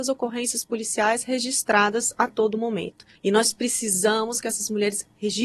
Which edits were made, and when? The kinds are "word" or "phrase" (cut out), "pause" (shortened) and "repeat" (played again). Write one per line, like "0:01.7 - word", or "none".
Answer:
0:03.2 - pause